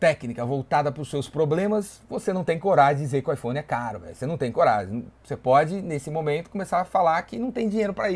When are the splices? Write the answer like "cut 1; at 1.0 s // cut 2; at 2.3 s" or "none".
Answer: none